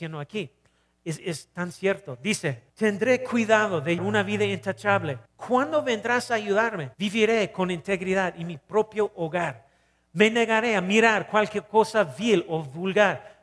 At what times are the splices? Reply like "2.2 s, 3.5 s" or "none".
2.7 s, 4.0 s, 5.2 s, 6.9 s

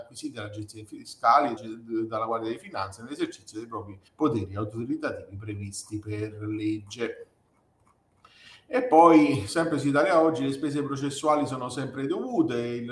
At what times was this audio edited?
1.6 s, 4.1 s

